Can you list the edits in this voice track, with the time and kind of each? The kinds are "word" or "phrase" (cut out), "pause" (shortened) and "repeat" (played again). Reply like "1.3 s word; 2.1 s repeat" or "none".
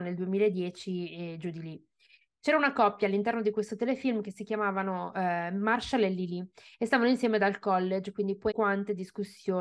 8.5 s word